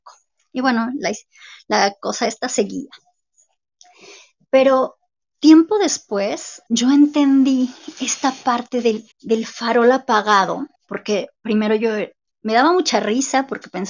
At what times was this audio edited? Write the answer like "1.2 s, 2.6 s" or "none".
5.2 s, 6.7 s, 9.1 s, 10.7 s

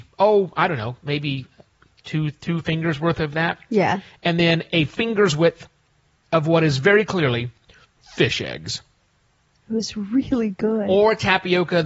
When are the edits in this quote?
none

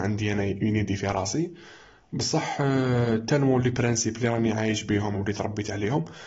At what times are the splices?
5.1 s

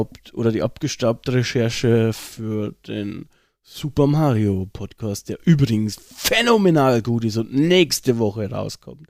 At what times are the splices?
none

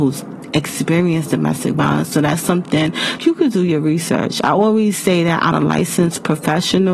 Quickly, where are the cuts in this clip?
3.2 s, 5.5 s

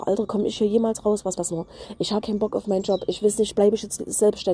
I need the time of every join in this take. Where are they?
1.4 s, 2.2 s

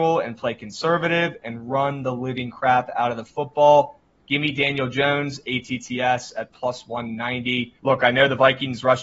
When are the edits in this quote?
7.8 s

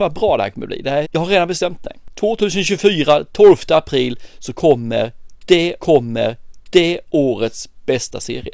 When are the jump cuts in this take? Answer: 1.0 s, 5.8 s

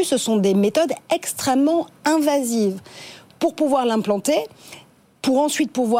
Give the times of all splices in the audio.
none

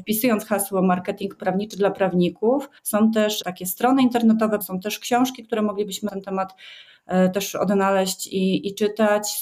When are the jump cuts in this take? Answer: 2.8 s, 3.4 s, 4.6 s, 6.1 s

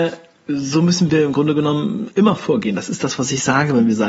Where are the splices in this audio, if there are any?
none

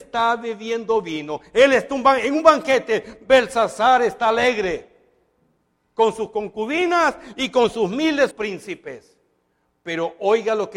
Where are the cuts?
8.3 s

